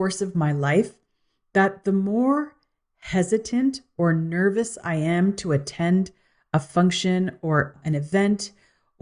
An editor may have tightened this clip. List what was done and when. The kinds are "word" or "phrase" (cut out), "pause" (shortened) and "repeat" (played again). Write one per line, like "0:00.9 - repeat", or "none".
none